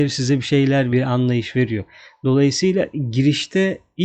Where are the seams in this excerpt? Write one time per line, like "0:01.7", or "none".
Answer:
0:00.9